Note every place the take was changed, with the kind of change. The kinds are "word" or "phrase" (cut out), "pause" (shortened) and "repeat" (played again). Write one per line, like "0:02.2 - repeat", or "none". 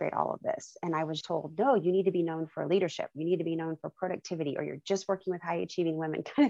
0:01.2 - word